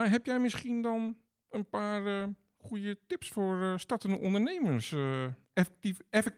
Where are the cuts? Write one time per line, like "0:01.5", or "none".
none

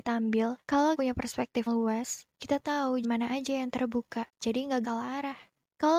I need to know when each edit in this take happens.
0:00.9
0:01.7
0:03.0
0:04.3
0:04.8

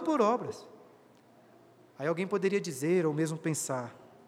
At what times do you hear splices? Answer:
none

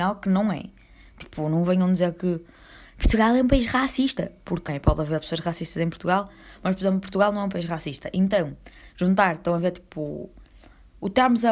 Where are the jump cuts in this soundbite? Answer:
0:04.7

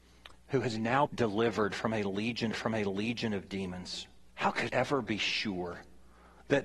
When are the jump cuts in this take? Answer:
0:01.1
0:02.5
0:04.3
0:04.7

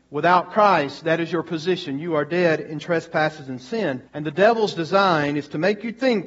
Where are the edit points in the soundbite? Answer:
0:04.1

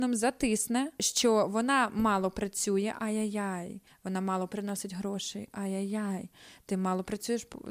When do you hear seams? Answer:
none

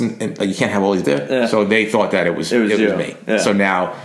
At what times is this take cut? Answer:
0:01.0

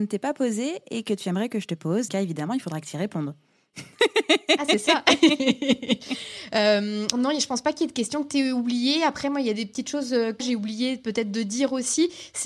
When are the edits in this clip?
0:02.1
0:07.1
0:10.4

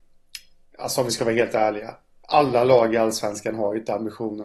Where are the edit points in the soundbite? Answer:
none

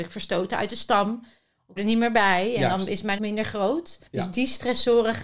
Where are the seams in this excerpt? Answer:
0:01.8
0:03.2
0:04.1

